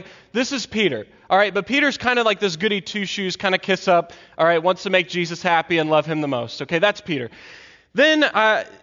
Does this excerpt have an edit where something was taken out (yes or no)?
no